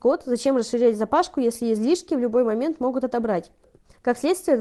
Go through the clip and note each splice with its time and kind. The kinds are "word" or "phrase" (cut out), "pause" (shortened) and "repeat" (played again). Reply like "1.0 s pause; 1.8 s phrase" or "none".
none